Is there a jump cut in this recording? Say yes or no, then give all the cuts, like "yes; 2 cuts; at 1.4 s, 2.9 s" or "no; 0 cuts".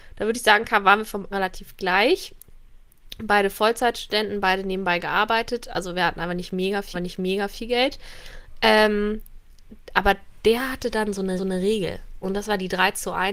yes; 3 cuts; at 1.3 s, 6.9 s, 11.4 s